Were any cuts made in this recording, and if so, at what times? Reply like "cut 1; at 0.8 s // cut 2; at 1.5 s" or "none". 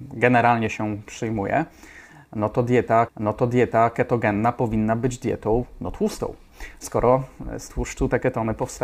cut 1; at 3.1 s